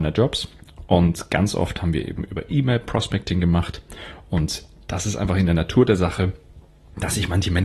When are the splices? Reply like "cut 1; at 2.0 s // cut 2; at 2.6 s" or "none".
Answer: none